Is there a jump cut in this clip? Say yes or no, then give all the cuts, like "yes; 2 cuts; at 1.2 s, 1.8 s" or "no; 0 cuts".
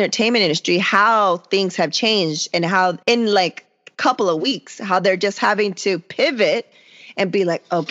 yes; 1 cut; at 3.0 s